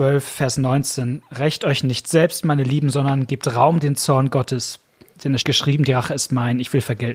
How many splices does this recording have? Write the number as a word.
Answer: one